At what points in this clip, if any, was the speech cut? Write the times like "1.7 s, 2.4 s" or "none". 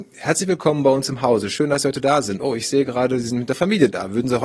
none

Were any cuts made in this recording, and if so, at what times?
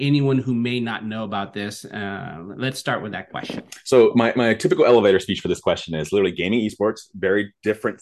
none

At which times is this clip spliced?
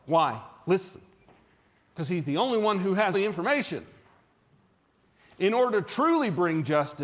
1.4 s, 3.1 s

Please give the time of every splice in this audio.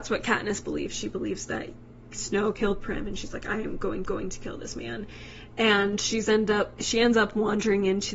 4.0 s

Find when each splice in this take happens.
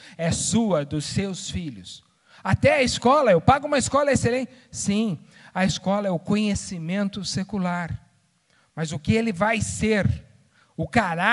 none

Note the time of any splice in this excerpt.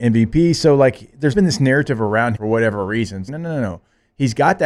1.3 s, 2.3 s, 3.3 s

